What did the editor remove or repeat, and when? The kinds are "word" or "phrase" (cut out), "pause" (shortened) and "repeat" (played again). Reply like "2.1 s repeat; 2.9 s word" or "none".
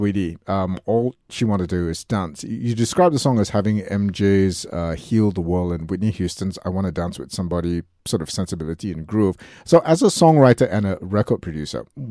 none